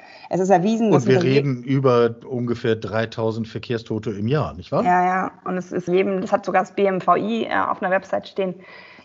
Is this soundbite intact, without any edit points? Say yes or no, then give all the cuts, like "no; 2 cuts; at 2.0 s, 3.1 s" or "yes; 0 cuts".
no; 1 cut; at 5.9 s